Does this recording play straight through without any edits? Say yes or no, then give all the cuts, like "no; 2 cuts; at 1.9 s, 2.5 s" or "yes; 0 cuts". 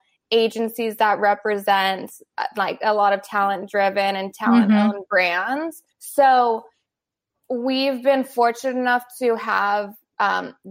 no; 1 cut; at 5.9 s